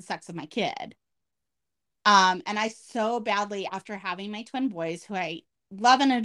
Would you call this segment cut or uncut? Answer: uncut